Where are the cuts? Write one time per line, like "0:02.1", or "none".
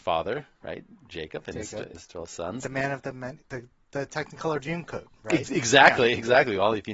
0:01.9